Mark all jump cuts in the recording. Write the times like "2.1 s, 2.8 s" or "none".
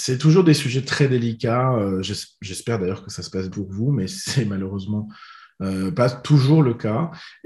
3.5 s